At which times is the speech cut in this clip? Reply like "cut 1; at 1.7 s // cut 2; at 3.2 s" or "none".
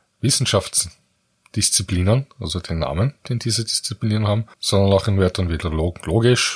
cut 1; at 3.2 s // cut 2; at 4.5 s // cut 3; at 5.6 s